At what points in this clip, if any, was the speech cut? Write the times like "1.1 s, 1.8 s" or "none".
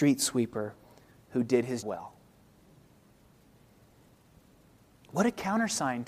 1.8 s